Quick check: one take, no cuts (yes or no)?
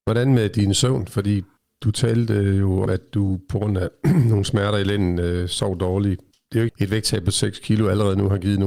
no